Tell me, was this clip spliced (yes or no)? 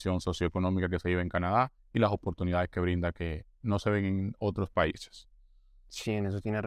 no